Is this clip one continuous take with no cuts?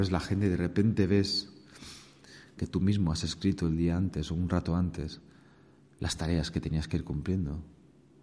yes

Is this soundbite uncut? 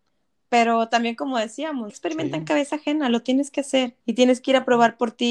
no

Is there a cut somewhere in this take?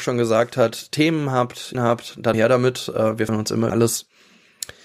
yes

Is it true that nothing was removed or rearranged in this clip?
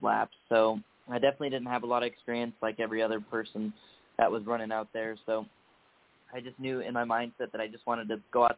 yes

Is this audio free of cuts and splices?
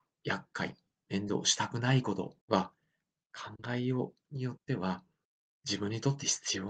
no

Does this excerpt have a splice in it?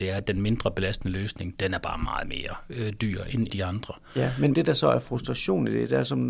yes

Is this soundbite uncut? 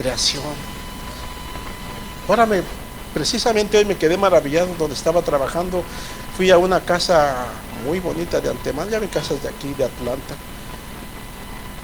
no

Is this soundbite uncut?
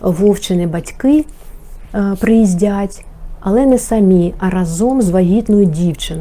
yes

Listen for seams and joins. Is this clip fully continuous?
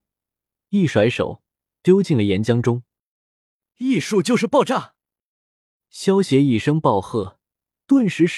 yes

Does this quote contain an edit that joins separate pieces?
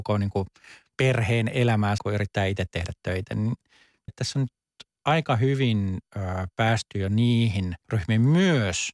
yes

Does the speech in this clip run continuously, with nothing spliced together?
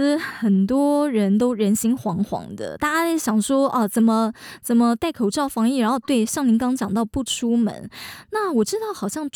yes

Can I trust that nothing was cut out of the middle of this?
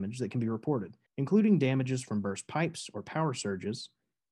no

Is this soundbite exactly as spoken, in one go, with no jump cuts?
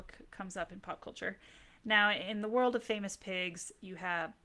yes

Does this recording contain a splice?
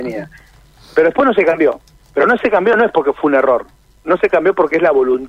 no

